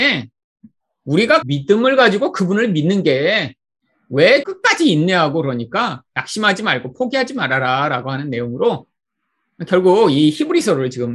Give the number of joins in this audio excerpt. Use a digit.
2